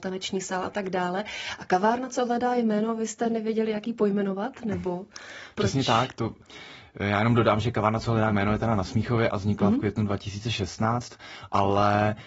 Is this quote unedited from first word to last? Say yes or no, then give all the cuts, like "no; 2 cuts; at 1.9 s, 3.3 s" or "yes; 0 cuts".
yes; 0 cuts